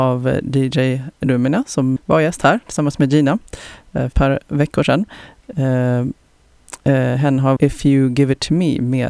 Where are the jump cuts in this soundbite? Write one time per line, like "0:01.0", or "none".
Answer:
0:01.1
0:02.0
0:04.1
0:07.6